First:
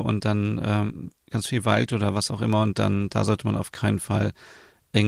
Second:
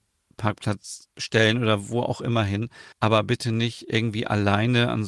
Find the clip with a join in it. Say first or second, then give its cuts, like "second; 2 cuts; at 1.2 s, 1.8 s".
second; 1 cut; at 2.9 s